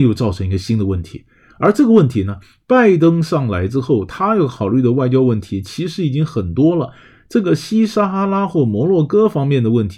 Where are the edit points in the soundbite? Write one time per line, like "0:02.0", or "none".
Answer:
none